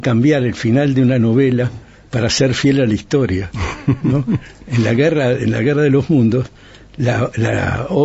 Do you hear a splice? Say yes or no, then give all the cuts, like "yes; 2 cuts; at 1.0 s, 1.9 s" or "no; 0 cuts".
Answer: no; 0 cuts